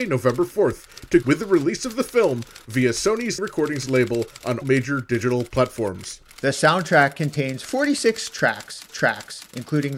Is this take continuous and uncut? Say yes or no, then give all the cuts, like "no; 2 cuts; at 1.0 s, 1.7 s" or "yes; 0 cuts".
no; 4 cuts; at 1.2 s, 3.4 s, 4.6 s, 8.9 s